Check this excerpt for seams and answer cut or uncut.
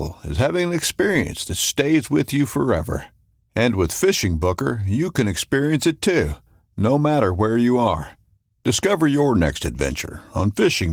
uncut